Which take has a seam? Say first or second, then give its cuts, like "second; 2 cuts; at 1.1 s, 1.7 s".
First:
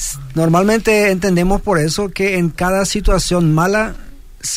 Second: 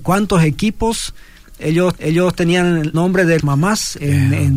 second; 3 cuts; at 2.0 s, 2.9 s, 3.4 s